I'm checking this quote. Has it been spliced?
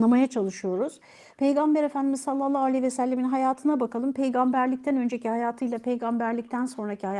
no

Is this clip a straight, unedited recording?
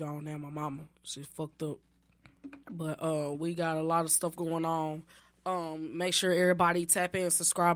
no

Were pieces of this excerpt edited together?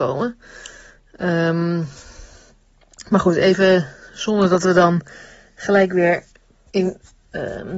no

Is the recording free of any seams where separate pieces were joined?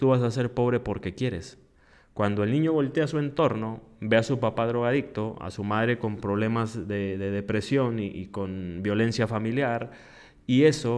yes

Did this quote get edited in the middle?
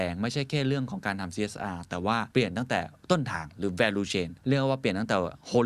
yes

